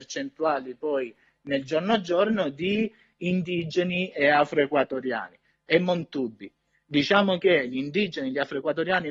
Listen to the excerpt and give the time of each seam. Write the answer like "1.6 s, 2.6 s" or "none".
none